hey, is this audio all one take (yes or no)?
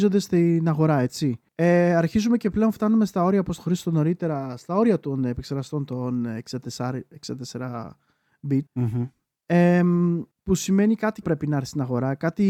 no